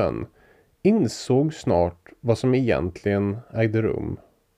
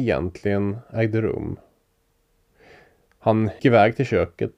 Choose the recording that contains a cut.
second; 1 cut; at 3.6 s

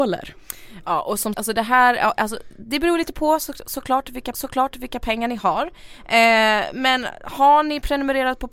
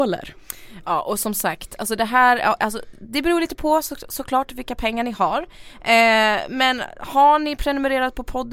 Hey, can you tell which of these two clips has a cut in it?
first; 2 cuts; at 1.3 s, 4.3 s

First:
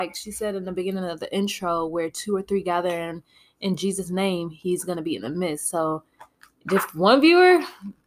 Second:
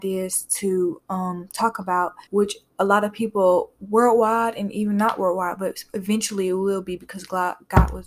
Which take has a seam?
second; 1 cut; at 2.3 s

